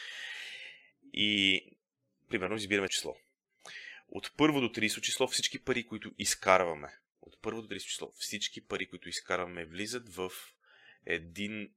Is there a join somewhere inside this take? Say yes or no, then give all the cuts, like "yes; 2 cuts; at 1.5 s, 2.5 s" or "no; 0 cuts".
yes; 1 cut; at 2.9 s